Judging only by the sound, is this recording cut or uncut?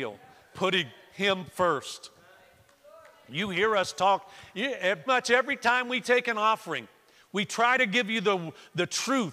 cut